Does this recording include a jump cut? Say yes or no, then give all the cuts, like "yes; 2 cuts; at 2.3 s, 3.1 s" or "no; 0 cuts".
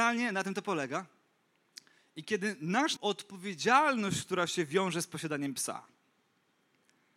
yes; 1 cut; at 3.0 s